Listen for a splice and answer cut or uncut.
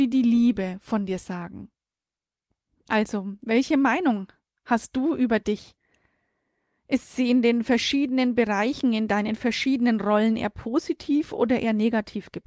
uncut